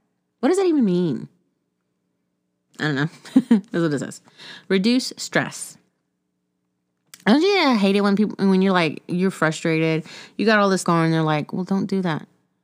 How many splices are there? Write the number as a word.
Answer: one